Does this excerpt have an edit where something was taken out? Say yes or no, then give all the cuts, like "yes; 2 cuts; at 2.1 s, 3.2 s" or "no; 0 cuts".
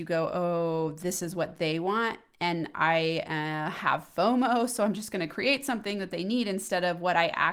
no; 0 cuts